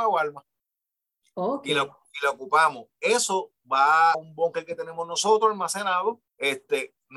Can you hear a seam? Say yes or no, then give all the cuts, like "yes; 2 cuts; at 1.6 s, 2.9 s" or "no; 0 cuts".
yes; 2 cuts; at 4.1 s, 6.3 s